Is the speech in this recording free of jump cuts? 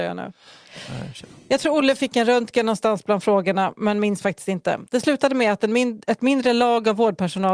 yes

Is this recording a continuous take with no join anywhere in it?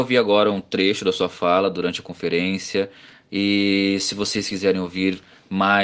yes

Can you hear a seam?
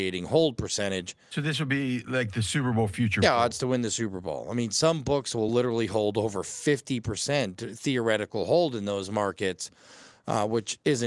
no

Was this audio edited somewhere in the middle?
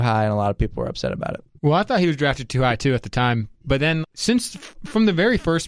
yes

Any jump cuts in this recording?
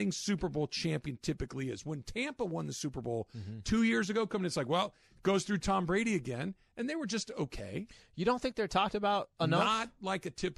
no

